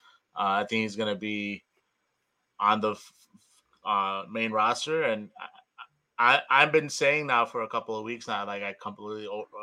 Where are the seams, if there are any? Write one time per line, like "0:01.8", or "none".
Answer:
none